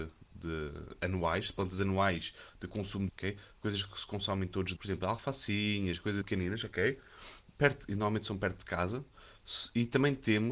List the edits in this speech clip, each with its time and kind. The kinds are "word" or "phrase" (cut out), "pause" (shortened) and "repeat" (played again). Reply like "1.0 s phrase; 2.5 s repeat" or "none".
3.1 s word; 4.8 s word; 6.2 s word